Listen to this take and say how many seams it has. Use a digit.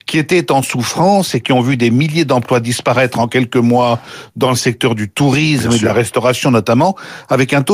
0